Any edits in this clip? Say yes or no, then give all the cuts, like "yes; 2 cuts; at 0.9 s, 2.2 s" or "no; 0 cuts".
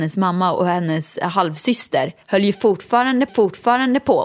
yes; 2 cuts; at 2.2 s, 3.3 s